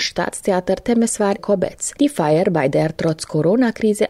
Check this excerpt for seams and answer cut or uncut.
cut